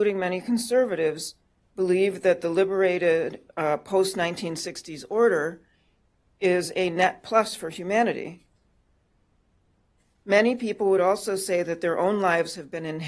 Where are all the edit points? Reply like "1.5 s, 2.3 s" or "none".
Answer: none